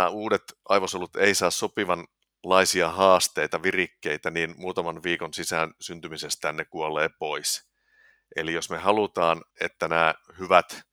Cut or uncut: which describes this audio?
cut